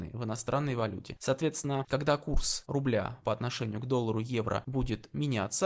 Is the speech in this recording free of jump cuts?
yes; 0 cuts

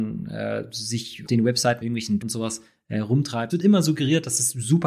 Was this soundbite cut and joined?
yes; 4 cuts; at 1.3 s, 1.8 s, 2.2 s, 3.5 s

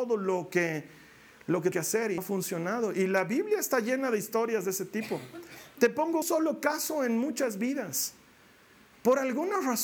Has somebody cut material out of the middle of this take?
yes; 3 cuts; at 1.7 s, 2.2 s, 6.2 s

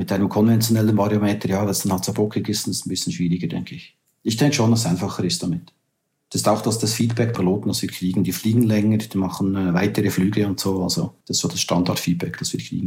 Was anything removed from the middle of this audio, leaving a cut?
yes; 3 cuts; at 4.0 s, 7.3 s, 11.2 s

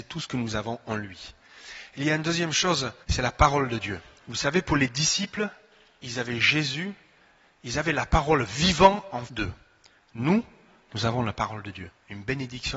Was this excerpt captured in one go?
no; 2 cuts; at 3.0 s, 9.3 s

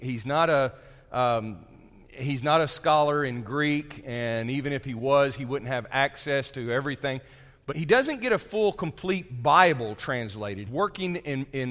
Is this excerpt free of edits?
no; 2 cuts; at 7.7 s, 10.7 s

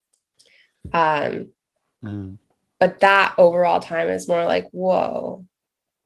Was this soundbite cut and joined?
no; 0 cuts

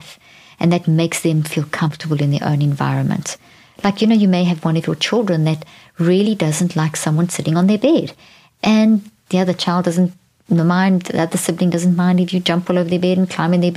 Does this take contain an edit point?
no; 0 cuts

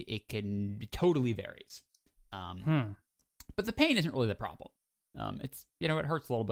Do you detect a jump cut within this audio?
no; 0 cuts

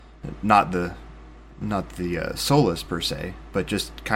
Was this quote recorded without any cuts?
yes; 0 cuts

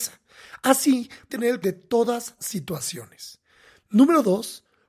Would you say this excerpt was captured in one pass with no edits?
no; 3 cuts; at 1.3 s, 1.6 s, 2.4 s

